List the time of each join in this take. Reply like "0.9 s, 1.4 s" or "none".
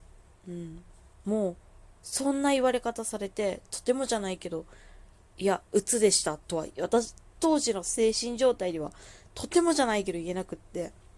5.1 s